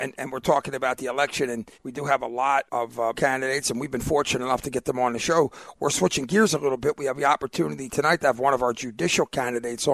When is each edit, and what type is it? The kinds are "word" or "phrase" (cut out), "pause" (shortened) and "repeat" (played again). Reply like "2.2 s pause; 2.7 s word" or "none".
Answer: 1.7 s pause; 2.7 s word; 3.1 s word